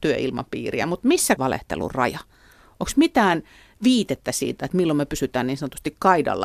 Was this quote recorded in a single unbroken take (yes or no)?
no